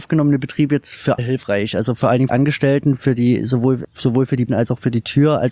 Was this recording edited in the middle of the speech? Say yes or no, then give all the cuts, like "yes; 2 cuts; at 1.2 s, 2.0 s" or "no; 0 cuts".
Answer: yes; 4 cuts; at 1.2 s, 2.3 s, 3.8 s, 4.5 s